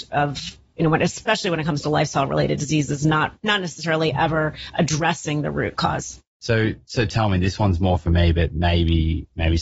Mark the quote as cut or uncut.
cut